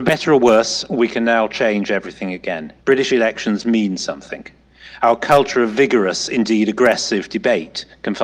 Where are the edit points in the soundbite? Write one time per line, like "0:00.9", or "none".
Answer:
0:02.8